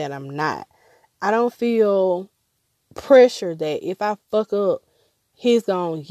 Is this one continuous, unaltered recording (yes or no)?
yes